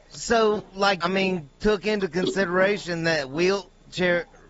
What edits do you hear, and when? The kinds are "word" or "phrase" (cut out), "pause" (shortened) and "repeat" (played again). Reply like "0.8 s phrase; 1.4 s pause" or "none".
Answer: 1.0 s phrase